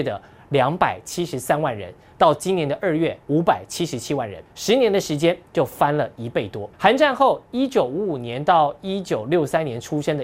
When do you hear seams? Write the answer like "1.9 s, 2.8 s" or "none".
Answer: 3.2 s, 4.5 s, 6.7 s